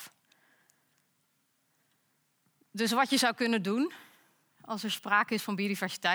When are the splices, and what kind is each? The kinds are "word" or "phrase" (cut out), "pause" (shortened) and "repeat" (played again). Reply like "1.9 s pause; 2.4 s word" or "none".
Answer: none